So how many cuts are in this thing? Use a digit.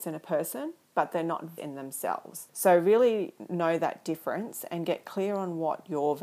2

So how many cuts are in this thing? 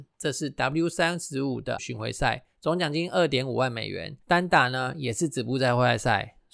2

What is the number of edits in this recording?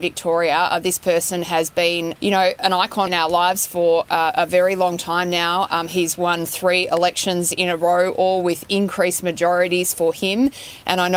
2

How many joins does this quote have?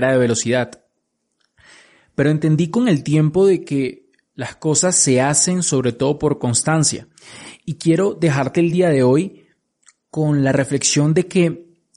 0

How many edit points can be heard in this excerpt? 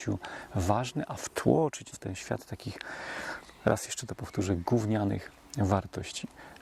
1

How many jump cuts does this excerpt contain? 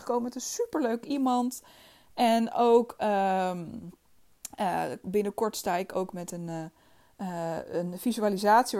0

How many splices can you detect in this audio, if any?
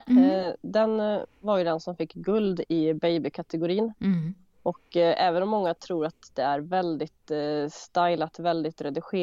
0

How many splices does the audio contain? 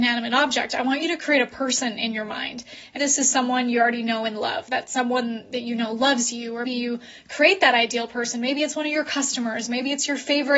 2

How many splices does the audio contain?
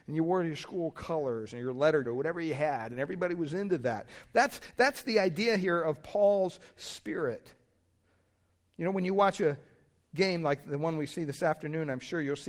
1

